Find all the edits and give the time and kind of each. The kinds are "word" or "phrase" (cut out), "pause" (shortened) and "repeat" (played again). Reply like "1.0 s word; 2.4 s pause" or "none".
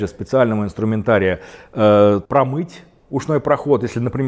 2.2 s pause